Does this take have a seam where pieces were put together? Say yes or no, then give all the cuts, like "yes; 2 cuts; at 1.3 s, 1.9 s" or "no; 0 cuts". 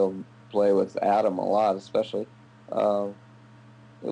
yes; 1 cut; at 2.4 s